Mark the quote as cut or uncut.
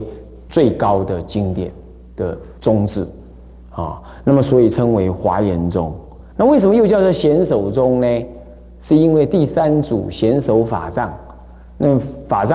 cut